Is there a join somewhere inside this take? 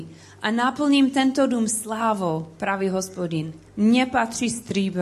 yes; 1 cut; at 3.7 s

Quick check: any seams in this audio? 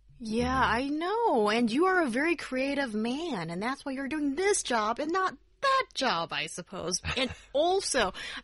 no; 0 cuts

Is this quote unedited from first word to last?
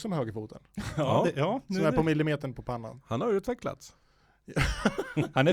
yes; 0 cuts

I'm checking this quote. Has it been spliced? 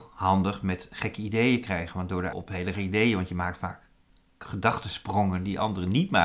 yes; 2 cuts; at 2.3 s, 2.7 s

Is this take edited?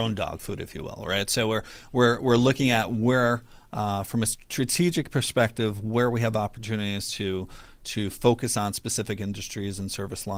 no; 0 cuts

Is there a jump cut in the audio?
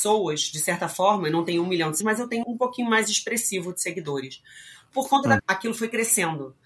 yes; 3 cuts; at 2.0 s, 2.4 s, 5.4 s

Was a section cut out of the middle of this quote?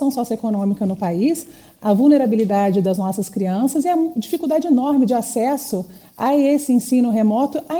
no; 0 cuts

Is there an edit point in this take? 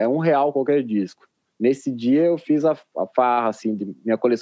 no; 0 cuts

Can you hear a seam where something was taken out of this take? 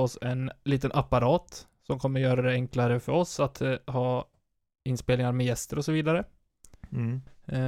no; 0 cuts

